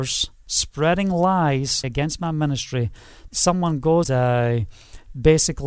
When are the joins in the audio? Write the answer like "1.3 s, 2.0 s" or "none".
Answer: 1.8 s, 3.3 s, 4.0 s